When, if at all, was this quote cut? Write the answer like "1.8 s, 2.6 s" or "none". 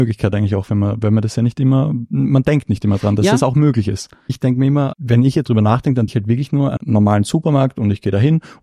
4.9 s, 5.4 s, 6.1 s, 6.8 s